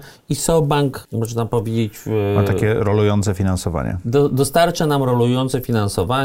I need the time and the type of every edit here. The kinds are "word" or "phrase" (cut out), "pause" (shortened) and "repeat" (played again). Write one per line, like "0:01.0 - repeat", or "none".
none